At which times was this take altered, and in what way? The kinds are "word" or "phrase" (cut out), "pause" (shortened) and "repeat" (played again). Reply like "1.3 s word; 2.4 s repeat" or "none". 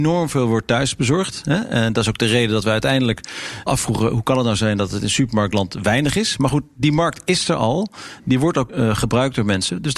3.7 s word; 8.7 s word